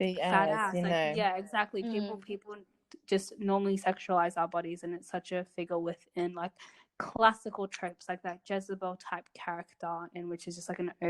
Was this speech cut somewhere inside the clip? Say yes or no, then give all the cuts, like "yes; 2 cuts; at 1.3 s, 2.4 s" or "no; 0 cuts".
no; 0 cuts